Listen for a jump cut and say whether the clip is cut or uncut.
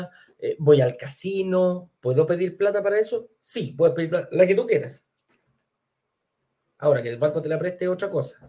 cut